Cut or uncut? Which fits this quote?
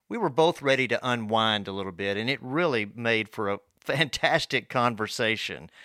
uncut